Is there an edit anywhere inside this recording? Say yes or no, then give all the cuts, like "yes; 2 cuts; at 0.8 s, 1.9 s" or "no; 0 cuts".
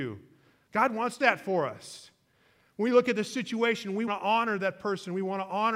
yes; 2 cuts; at 1.2 s, 4.1 s